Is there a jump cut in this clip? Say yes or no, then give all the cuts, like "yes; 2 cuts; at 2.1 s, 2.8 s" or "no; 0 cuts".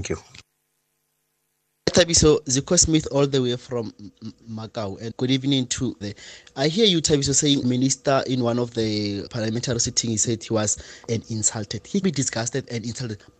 yes; 6 cuts; at 5.1 s, 6.0 s, 7.6 s, 9.3 s, 11.1 s, 12.0 s